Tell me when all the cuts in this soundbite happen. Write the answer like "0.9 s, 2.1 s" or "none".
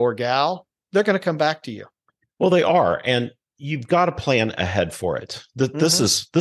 none